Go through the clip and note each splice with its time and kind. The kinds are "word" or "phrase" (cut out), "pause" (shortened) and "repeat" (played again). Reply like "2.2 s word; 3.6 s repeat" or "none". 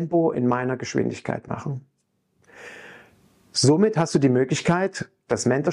none